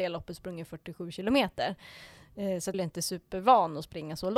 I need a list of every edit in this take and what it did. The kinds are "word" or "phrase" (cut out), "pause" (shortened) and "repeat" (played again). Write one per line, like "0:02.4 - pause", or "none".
0:02.7 - phrase